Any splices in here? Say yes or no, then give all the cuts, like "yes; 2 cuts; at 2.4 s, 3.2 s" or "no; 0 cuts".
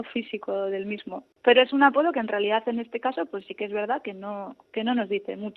yes; 2 cuts; at 1.3 s, 4.7 s